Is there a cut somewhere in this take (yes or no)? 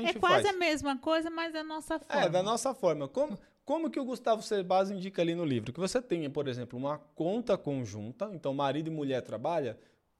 no